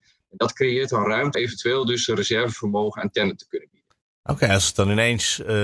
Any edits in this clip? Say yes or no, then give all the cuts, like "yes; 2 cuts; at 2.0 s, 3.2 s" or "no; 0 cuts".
yes; 1 cut; at 1.3 s